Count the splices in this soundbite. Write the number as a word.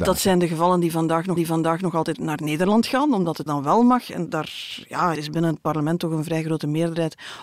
three